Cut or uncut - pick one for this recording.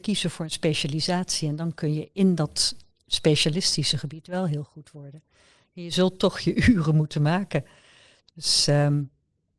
uncut